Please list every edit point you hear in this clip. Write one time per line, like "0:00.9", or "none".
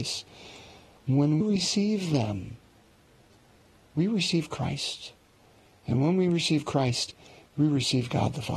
0:01.4

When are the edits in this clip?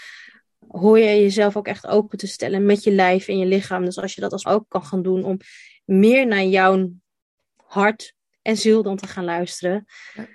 0:04.4

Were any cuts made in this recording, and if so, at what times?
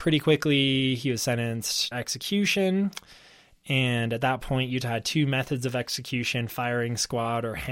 0:01.9

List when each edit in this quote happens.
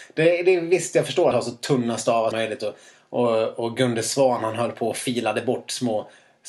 0:01.3
0:02.3

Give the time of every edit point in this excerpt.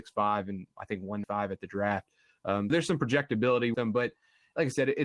0:01.2
0:02.7
0:03.7

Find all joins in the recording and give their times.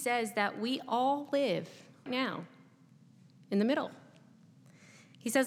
0:02.1

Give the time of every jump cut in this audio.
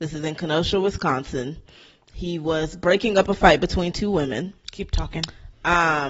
none

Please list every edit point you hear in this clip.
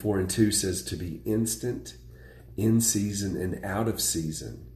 none

